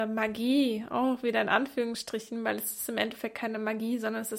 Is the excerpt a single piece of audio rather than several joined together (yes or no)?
yes